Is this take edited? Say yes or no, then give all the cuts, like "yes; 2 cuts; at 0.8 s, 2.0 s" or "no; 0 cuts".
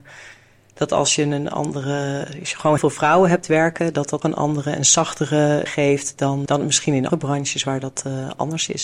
yes; 5 cuts; at 2.8 s, 4.2 s, 5.7 s, 6.5 s, 7.1 s